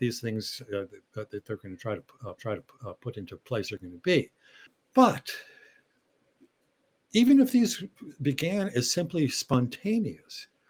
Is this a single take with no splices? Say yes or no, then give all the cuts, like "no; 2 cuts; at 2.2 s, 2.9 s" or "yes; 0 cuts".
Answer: no; 2 cuts; at 2.4 s, 4.7 s